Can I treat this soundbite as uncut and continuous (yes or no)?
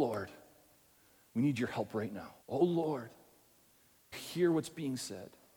no